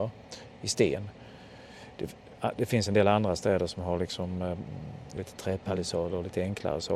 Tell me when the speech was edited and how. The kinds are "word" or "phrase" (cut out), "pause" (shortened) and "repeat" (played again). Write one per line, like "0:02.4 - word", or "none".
0:05.2 - phrase

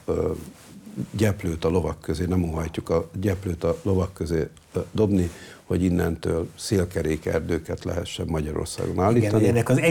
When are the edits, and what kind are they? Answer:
none

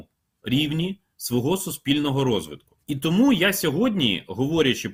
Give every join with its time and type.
0:02.8 - pause

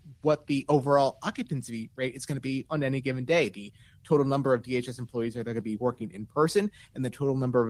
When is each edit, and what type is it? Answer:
none

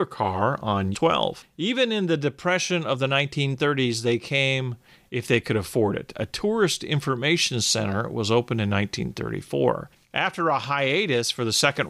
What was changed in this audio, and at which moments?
0:00.9 - word

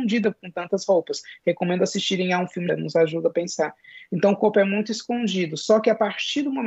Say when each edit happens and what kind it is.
0:02.7 - phrase

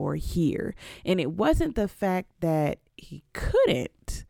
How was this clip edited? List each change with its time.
none

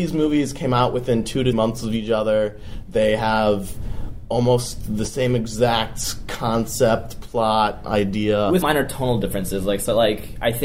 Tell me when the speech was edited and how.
0:01.5 - word
0:08.6 - word

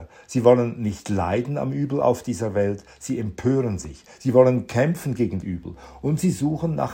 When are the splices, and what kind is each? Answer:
0:05.4 - word

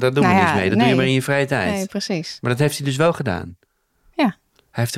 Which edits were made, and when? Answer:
none

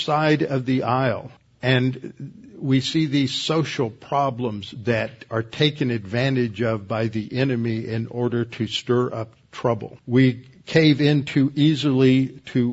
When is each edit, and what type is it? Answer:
0:01.4 - pause
0:10.0 - pause

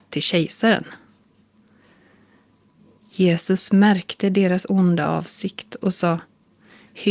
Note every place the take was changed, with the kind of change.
none

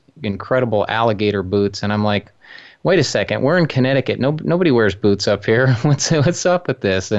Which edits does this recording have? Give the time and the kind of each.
none

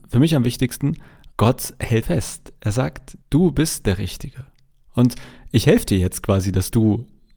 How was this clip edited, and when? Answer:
0:01.3 - pause
0:02.0 - phrase
0:03.2 - pause

